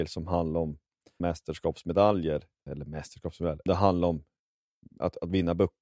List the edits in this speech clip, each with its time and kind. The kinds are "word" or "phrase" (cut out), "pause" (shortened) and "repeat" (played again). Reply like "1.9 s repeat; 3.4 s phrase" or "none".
1.2 s word; 2.7 s word; 3.7 s word; 4.8 s word